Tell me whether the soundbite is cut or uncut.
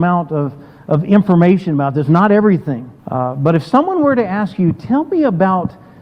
cut